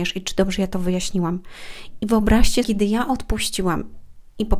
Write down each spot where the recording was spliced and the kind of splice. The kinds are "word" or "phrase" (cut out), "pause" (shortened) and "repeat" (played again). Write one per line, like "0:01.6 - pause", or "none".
0:02.6 - phrase